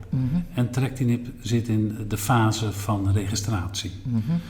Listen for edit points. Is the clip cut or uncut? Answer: uncut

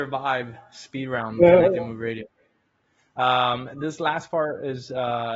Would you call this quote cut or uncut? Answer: uncut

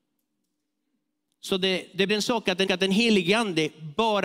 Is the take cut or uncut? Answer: cut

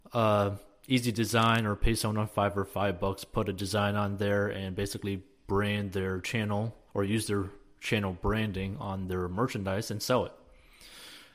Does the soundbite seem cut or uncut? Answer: cut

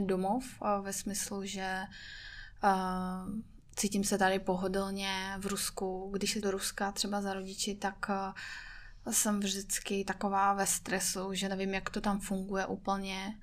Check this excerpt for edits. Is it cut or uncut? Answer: cut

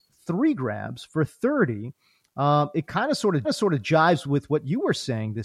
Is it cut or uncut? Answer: cut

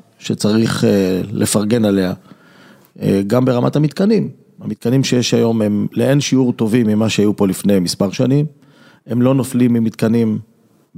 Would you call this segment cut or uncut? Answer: uncut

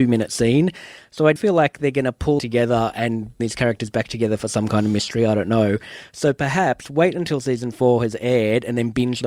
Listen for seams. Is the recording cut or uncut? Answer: cut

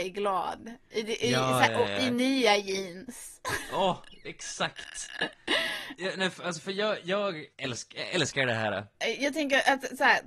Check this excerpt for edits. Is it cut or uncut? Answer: cut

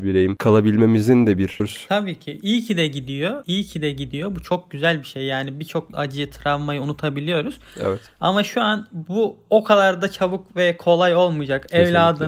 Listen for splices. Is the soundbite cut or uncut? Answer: cut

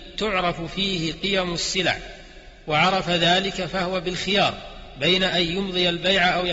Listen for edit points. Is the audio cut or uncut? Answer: uncut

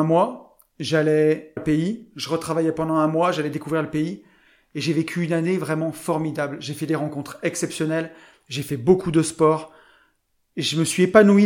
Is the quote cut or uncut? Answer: cut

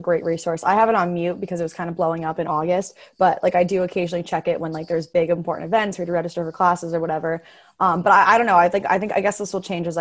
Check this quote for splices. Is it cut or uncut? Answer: uncut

